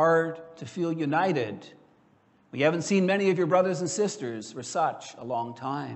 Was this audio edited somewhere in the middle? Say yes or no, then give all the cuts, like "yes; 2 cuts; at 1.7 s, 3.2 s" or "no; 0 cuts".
no; 0 cuts